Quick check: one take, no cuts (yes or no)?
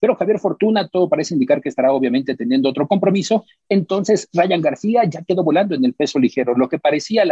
yes